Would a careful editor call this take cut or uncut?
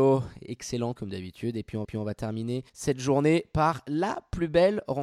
cut